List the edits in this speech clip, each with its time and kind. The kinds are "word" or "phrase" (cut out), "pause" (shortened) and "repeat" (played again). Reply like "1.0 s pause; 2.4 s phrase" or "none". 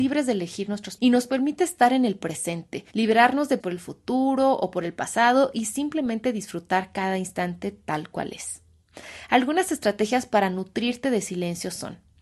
1.0 s phrase; 2.9 s pause; 3.6 s word